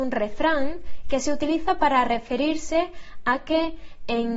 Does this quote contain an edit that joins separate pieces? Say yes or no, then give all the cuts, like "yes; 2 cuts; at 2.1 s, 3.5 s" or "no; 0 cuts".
no; 0 cuts